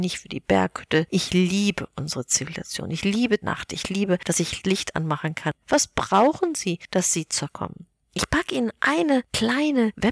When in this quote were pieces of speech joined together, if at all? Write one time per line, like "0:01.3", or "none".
0:03.4
0:04.6
0:05.6
0:07.5
0:08.0